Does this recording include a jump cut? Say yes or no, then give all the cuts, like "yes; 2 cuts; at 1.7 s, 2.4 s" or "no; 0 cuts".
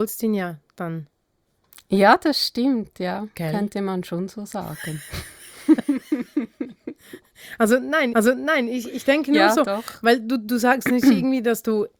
yes; 1 cut; at 8.1 s